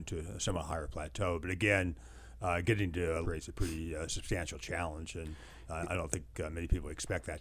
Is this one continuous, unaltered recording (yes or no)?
no